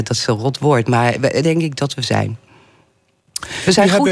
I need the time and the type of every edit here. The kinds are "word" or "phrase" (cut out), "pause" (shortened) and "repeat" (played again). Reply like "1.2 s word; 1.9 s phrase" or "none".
1.4 s word